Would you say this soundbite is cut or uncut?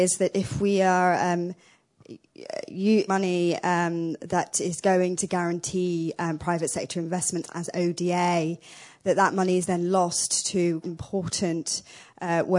cut